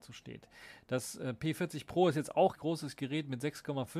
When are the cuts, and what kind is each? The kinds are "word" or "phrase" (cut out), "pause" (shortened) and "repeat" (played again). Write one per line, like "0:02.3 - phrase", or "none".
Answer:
0:02.6 - phrase

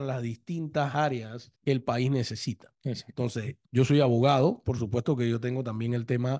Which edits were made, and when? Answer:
0:01.6 - pause
0:03.7 - pause

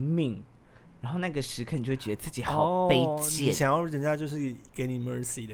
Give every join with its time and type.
none

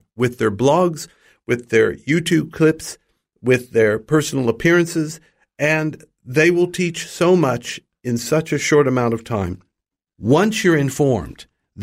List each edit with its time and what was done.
none

